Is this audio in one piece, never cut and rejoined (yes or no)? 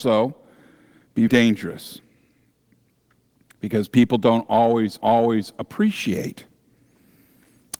no